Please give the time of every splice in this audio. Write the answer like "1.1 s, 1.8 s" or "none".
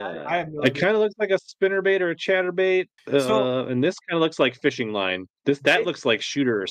3.0 s